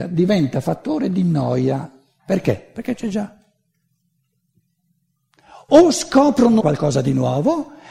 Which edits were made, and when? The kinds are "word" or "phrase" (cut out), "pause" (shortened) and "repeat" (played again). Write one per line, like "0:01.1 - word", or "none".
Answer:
0:06.6 - word